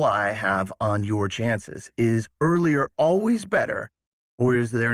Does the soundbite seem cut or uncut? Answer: uncut